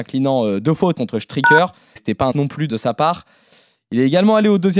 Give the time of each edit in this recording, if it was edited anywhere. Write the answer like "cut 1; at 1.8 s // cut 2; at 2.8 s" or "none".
cut 1; at 0.9 s // cut 2; at 2.0 s // cut 3; at 2.3 s // cut 4; at 2.7 s